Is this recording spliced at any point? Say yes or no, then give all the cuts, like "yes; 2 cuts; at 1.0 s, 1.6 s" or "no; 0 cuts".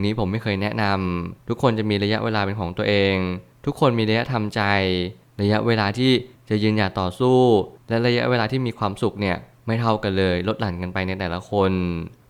yes; 1 cut; at 1.4 s